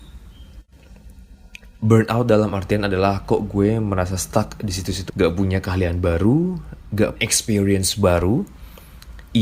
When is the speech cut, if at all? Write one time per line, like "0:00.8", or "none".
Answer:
0:05.1
0:07.2